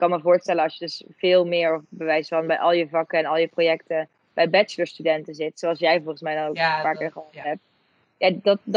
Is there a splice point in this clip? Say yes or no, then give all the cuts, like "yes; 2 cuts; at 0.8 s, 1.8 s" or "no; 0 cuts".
no; 0 cuts